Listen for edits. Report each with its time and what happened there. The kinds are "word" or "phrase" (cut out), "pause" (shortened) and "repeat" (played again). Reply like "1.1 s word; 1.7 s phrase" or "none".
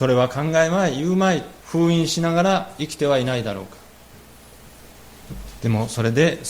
1.6 s pause